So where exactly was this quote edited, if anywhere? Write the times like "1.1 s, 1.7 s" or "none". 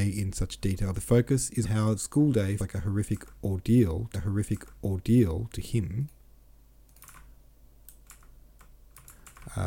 0.9 s, 1.6 s, 2.0 s, 2.6 s, 4.1 s